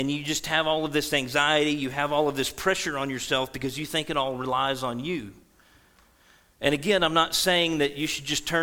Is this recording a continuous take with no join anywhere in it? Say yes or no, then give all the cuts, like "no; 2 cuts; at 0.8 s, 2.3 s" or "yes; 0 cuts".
yes; 0 cuts